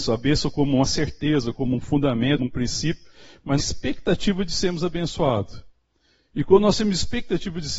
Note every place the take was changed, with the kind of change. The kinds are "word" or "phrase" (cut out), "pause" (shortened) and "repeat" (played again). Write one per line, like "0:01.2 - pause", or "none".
0:02.4 - word
0:03.6 - phrase

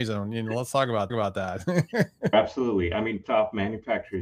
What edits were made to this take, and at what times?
0:01.1 - repeat
0:02.3 - word
0:03.2 - word

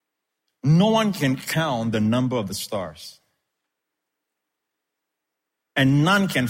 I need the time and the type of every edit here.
none

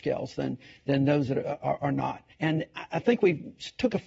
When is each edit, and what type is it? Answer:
0:02.3 - pause

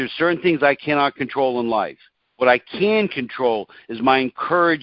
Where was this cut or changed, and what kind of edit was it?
0:02.2 - pause

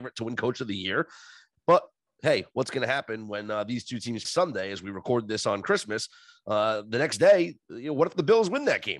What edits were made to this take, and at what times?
0:04.2 - phrase

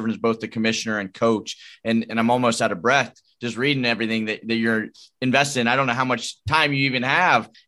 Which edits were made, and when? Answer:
none

